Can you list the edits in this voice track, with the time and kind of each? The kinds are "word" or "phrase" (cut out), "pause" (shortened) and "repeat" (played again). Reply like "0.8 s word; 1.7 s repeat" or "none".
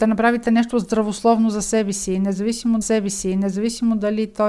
2.8 s repeat